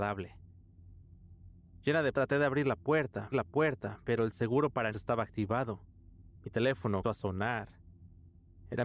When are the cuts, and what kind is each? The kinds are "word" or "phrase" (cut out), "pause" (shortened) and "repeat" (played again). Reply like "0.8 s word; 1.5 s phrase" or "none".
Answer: 1.7 s pause; 2.1 s word; 3.3 s repeat; 4.9 s word; 6.4 s pause; 7.0 s word